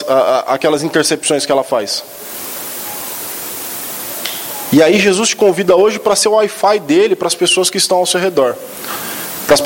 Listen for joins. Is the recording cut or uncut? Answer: uncut